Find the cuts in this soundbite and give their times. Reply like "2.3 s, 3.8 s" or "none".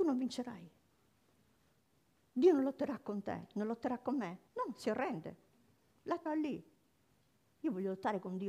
4.5 s, 6.3 s